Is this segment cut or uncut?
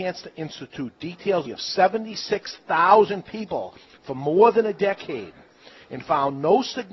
cut